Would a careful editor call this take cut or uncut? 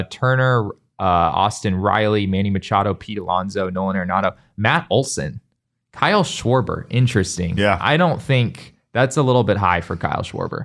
uncut